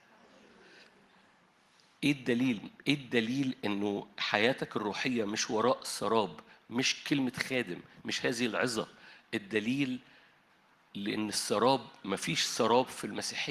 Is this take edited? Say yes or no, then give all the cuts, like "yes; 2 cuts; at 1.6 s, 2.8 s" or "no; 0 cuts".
no; 0 cuts